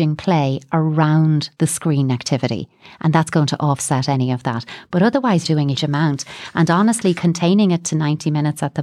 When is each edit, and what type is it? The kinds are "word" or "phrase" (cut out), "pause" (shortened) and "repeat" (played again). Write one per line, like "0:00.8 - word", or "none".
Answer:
0:01.6 - pause
0:05.4 - word
0:05.8 - word

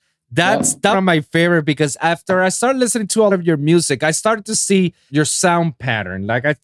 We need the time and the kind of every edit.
0:00.9 - phrase
0:03.3 - word
0:05.1 - word

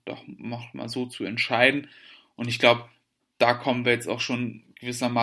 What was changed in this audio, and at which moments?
none

